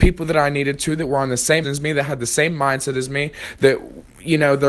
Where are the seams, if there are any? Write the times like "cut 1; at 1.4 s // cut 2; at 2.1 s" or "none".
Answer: cut 1; at 1.6 s